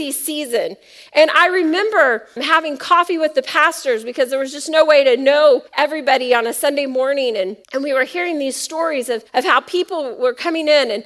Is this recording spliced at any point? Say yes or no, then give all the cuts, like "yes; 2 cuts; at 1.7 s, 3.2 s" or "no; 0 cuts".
yes; 4 cuts; at 2.4 s, 5.7 s, 7.6 s, 9.3 s